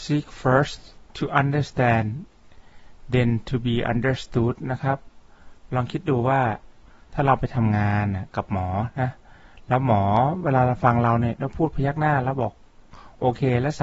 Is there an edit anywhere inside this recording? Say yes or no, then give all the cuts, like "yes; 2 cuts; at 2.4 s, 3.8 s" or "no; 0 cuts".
no; 0 cuts